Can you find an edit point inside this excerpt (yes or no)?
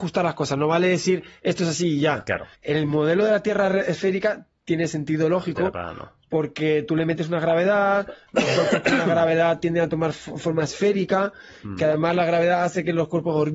yes